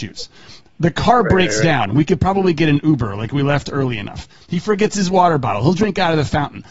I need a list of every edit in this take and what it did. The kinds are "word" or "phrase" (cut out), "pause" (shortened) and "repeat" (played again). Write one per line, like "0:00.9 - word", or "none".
none

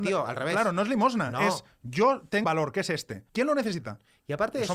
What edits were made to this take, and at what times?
0:02.4 - word
0:03.3 - pause

